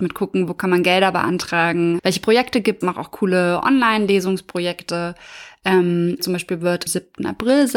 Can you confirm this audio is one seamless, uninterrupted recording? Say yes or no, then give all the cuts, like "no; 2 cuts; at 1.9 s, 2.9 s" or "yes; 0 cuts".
no; 4 cuts; at 2.0 s, 2.8 s, 6.2 s, 6.9 s